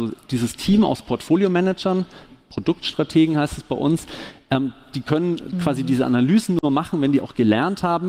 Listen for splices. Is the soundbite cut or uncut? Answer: uncut